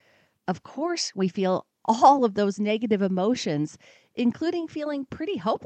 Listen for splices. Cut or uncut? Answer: uncut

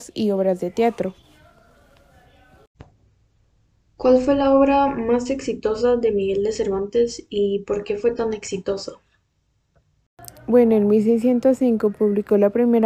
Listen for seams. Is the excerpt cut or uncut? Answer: uncut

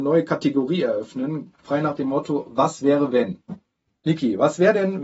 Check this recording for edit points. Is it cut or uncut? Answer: uncut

